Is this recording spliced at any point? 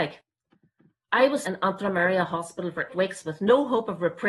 yes; 2 cuts; at 1.4 s, 2.9 s

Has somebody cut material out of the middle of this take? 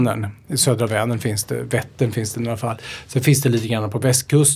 no; 0 cuts

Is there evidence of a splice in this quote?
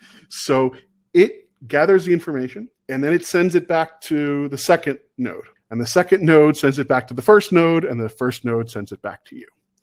yes; 2 cuts; at 2.8 s, 5.6 s

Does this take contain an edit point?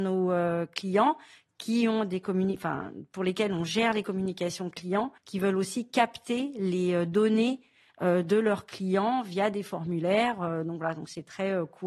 yes; 1 cut; at 5.2 s

